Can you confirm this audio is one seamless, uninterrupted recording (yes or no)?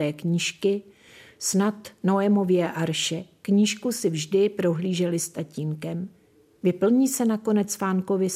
yes